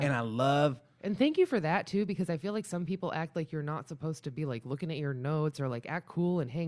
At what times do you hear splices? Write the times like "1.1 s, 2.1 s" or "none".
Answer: none